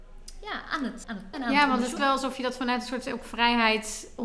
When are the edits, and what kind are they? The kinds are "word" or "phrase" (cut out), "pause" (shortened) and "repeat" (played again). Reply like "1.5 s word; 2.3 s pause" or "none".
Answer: 1.0 s word; 1.3 s word; 2.0 s word